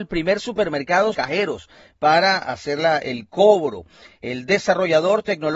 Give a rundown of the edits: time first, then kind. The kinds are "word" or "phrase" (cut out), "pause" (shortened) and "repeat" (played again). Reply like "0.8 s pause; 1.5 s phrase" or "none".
1.1 s phrase